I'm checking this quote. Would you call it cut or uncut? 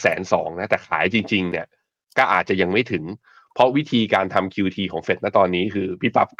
uncut